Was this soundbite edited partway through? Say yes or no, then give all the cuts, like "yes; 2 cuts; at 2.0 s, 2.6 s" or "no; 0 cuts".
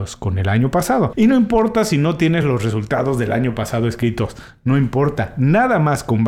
no; 0 cuts